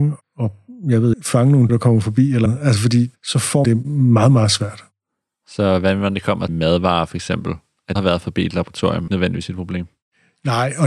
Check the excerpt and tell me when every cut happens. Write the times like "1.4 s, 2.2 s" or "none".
1.1 s, 1.7 s, 2.5 s, 3.6 s, 6.5 s, 8.0 s, 9.1 s